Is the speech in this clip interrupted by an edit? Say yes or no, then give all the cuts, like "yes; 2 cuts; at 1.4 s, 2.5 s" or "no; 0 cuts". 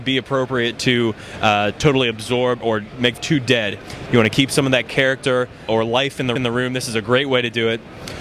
yes; 4 cuts; at 2.6 s, 3.2 s, 5.7 s, 6.4 s